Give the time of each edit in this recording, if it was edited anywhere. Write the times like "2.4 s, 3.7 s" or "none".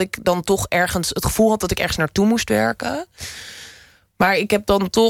none